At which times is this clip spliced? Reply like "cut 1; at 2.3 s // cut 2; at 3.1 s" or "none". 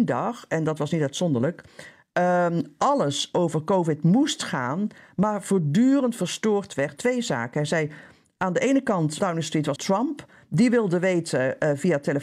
cut 1; at 7.0 s // cut 2; at 9.2 s // cut 3; at 9.8 s